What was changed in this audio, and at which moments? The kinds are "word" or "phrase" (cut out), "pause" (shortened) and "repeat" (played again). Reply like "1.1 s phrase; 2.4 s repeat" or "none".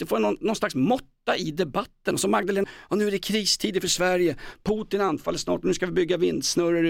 2.6 s word